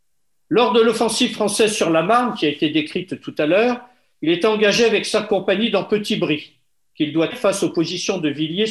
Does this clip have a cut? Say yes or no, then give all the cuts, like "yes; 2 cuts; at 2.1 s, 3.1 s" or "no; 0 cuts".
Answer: yes; 1 cut; at 7.3 s